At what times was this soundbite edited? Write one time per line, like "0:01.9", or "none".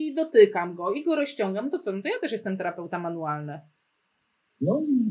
none